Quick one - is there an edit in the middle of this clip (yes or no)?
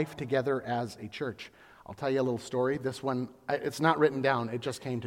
no